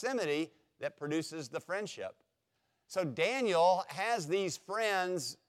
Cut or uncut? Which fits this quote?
uncut